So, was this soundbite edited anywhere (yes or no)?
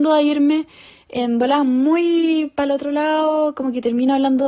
no